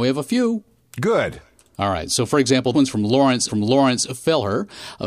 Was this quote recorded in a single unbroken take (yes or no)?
no